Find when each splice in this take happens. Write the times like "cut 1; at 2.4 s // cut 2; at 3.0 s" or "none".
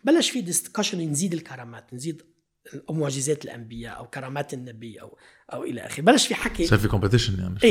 none